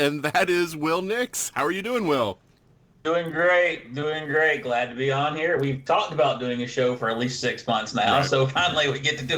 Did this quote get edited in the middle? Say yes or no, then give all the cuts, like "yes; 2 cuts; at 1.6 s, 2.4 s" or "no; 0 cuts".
no; 0 cuts